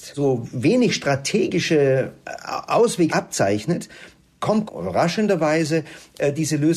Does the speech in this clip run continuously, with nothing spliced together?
no; 2 cuts; at 3.1 s, 4.7 s

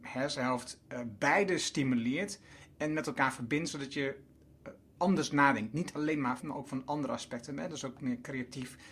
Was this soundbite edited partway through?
yes; 1 cut; at 6.4 s

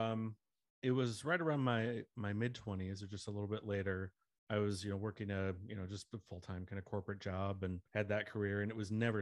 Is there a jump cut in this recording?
yes; 1 cut; at 7.9 s

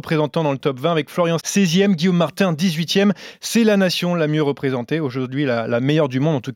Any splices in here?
yes; 1 cut; at 1.4 s

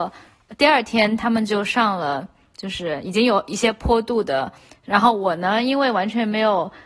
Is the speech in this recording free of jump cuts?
yes; 0 cuts

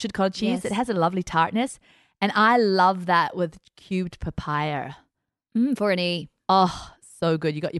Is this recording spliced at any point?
no; 0 cuts

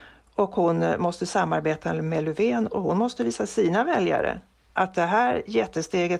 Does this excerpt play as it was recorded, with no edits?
yes; 0 cuts

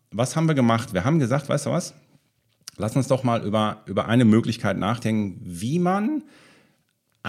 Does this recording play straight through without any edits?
yes; 0 cuts

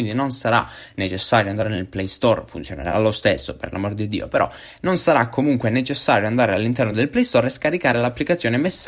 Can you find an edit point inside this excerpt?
no; 0 cuts

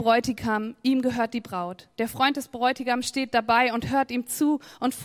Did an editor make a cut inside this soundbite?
no; 0 cuts

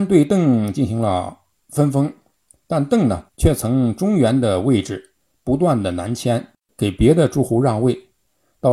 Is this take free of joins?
no; 2 cuts; at 3.3 s, 6.6 s

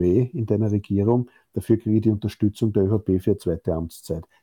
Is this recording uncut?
yes; 0 cuts

